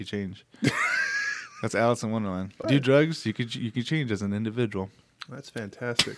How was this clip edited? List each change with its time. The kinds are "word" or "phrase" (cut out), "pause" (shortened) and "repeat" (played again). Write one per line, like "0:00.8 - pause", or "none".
0:02.6 - word